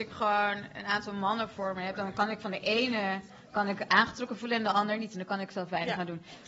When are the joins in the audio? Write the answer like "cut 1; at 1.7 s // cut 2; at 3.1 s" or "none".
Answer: none